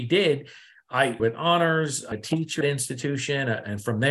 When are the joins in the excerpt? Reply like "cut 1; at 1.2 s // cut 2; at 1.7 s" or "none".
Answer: cut 1; at 1.2 s // cut 2; at 2.1 s // cut 3; at 2.6 s